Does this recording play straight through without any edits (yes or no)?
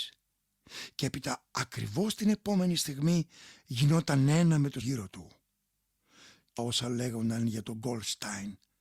no